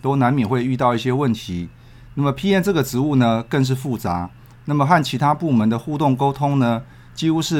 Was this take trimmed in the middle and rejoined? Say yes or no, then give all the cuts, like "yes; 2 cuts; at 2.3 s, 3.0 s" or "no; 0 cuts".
no; 0 cuts